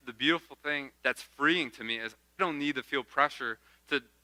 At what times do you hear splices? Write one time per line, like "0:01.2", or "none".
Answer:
0:01.0
0:02.4